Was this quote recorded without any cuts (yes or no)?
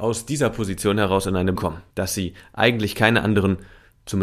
no